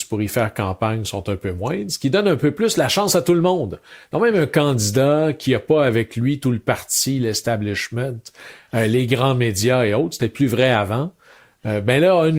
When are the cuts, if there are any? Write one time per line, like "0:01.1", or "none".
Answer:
none